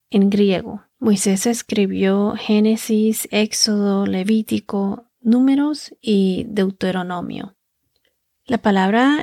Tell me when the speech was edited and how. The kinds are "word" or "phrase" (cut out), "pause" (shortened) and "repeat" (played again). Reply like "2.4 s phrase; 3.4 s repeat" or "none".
0.9 s pause; 5.1 s pause